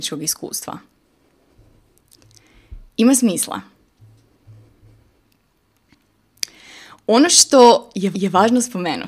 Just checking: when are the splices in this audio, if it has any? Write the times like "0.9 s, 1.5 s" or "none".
2.9 s, 8.1 s